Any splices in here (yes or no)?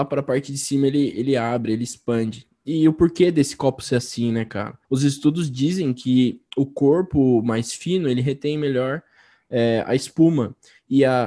yes